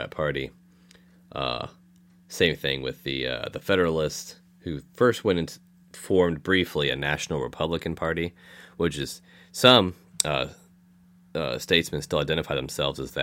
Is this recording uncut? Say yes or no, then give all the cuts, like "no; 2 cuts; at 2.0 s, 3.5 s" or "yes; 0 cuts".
yes; 0 cuts